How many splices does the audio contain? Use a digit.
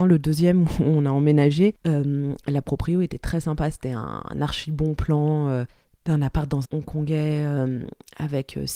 1